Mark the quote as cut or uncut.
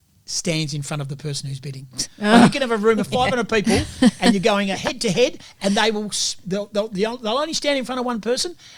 uncut